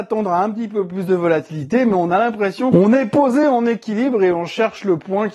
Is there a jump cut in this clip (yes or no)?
no